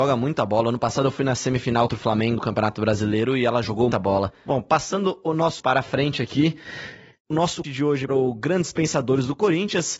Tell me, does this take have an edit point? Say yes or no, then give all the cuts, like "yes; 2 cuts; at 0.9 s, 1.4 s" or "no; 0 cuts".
yes; 6 cuts; at 1.9 s, 2.4 s, 3.9 s, 5.6 s, 7.6 s, 8.1 s